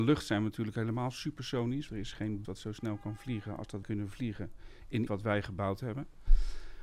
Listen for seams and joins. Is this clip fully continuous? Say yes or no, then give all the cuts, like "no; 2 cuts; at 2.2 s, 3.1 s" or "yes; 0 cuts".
no; 4 cuts; at 1.9 s, 2.4 s, 3.8 s, 5.1 s